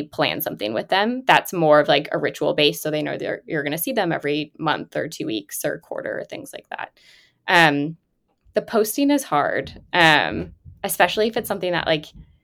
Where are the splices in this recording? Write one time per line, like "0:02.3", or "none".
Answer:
none